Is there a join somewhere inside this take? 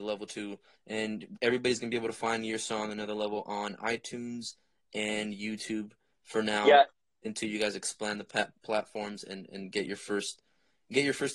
no; 0 cuts

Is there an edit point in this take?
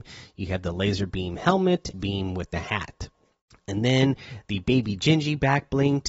yes; 2 cuts; at 1.9 s, 3.4 s

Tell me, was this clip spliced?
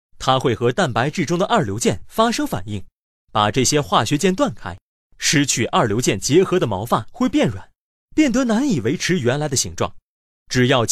no; 0 cuts

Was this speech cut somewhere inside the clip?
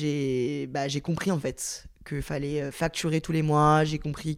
no; 0 cuts

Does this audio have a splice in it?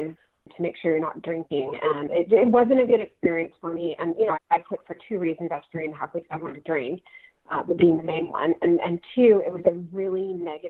yes; 1 cut; at 4.3 s

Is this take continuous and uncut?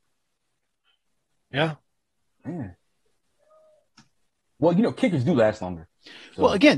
yes; 0 cuts

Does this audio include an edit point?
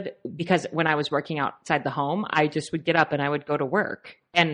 no; 0 cuts

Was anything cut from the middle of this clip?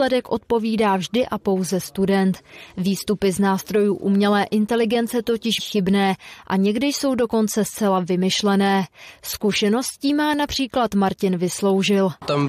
yes; 1 cut; at 5.6 s

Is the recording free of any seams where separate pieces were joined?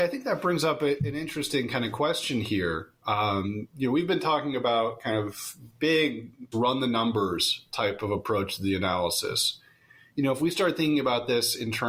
no; 1 cut; at 6.5 s

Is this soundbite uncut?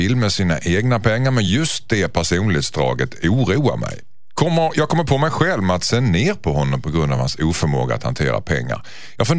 yes; 0 cuts

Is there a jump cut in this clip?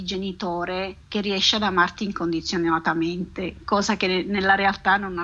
yes; 1 cut; at 1.0 s

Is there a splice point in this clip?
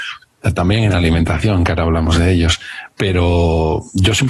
no; 0 cuts

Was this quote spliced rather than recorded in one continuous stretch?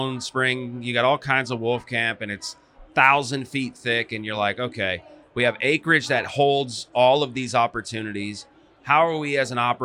no; 0 cuts

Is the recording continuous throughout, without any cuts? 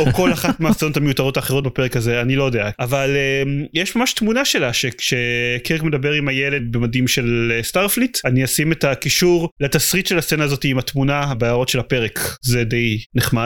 yes; 0 cuts

